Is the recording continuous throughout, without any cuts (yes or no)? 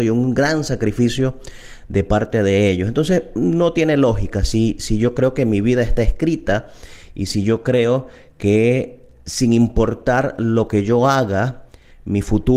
yes